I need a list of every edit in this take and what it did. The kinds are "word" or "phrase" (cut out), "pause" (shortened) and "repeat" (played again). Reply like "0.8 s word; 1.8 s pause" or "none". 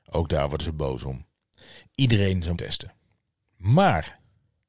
2.5 s word